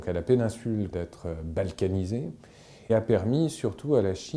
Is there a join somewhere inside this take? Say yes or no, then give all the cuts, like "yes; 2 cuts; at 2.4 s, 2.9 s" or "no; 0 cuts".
yes; 2 cuts; at 0.9 s, 2.9 s